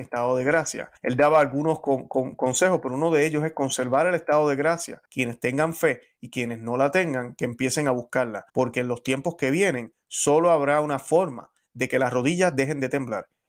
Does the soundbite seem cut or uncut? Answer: cut